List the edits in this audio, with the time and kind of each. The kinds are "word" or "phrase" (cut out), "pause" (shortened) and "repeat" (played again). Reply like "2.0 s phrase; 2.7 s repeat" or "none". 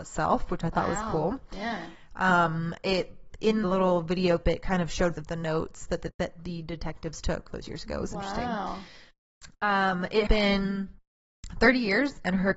3.6 s word; 4.4 s word; 5.2 s word; 6.1 s word; 7.5 s word; 10.3 s word